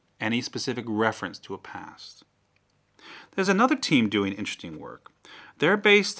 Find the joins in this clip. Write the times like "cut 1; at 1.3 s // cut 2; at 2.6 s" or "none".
none

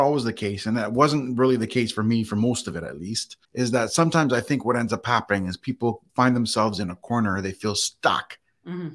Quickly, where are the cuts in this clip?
cut 1; at 3.4 s // cut 2; at 6.1 s

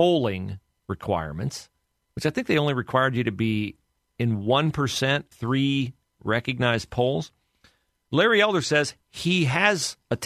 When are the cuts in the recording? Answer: cut 1; at 5.3 s

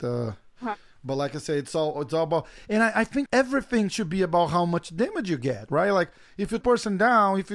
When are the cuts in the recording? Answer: cut 1; at 3.3 s // cut 2; at 6.6 s

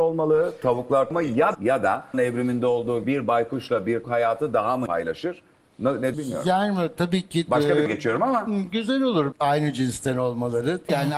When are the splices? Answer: cut 1; at 1.1 s // cut 2; at 1.5 s // cut 3; at 2.1 s // cut 4; at 3.0 s // cut 5; at 4.0 s // cut 6; at 4.9 s // cut 7; at 6.1 s // cut 8; at 7.9 s // cut 9; at 9.3 s

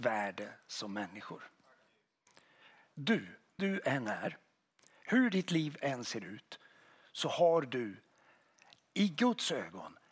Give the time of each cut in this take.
cut 1; at 3.6 s

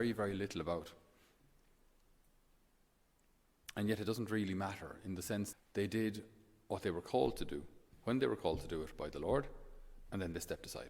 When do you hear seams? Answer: cut 1; at 5.5 s

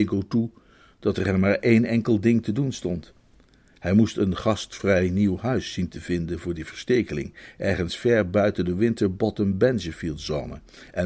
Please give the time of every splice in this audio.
none

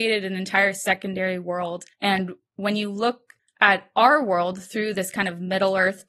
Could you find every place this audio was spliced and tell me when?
cut 1; at 1.9 s // cut 2; at 3.4 s

